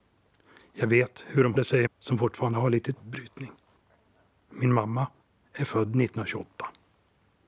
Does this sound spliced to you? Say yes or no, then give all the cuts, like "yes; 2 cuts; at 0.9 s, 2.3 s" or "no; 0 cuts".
yes; 4 cuts; at 1.5 s, 1.9 s, 2.9 s, 3.8 s